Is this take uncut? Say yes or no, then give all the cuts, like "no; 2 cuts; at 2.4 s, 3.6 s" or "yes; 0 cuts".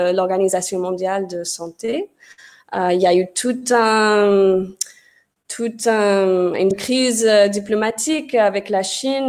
no; 1 cut; at 6.7 s